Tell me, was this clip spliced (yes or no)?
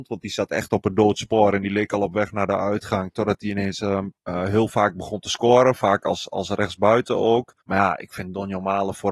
yes